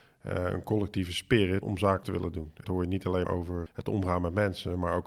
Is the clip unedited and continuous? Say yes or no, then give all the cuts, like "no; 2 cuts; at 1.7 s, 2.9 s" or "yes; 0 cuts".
no; 5 cuts; at 1.6 s, 2.0 s, 2.6 s, 3.2 s, 3.7 s